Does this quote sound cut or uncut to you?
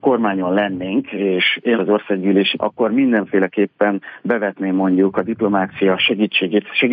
cut